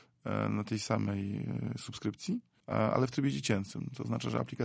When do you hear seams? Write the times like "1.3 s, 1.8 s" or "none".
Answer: 2.6 s